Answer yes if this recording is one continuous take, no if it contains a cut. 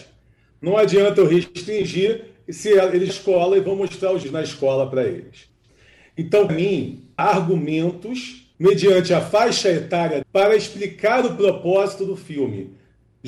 no